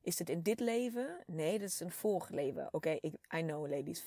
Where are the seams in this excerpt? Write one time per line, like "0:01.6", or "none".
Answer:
none